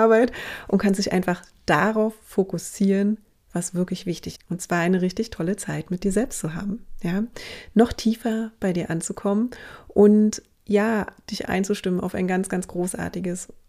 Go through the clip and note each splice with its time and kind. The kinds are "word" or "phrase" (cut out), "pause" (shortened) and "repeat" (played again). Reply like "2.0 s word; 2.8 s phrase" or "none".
4.4 s word; 11.4 s word

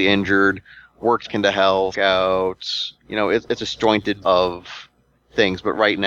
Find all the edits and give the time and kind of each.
1.3 s word; 1.9 s phrase; 3.0 s pause; 3.6 s phrase; 4.2 s word

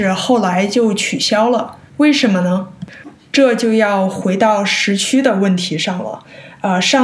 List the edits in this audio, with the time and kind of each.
1.9 s pause

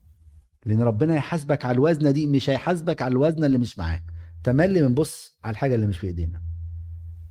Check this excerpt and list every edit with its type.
none

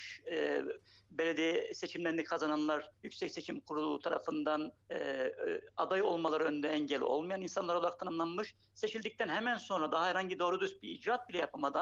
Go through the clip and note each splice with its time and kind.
2.9 s pause; 4.8 s pause

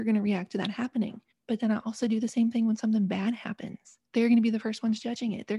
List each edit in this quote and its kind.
1.3 s pause; 4.0 s pause

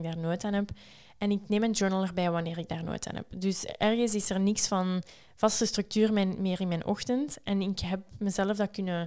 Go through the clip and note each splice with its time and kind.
none

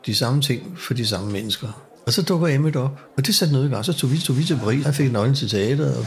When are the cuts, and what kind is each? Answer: 2.0 s pause; 3.1 s pause; 4.2 s repeat; 4.8 s word

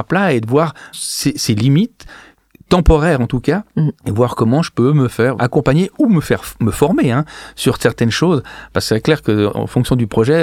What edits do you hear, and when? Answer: 0.9 s word; 4.0 s pause; 5.4 s word

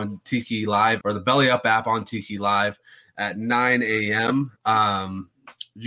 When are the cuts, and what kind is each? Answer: 1.0 s word

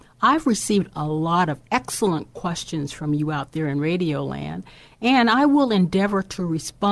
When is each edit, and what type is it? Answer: 1.7 s pause

